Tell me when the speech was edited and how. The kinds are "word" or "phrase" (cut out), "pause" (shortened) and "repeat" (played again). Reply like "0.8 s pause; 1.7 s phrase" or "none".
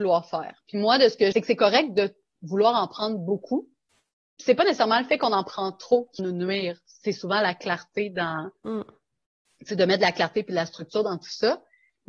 1.3 s phrase; 6.2 s word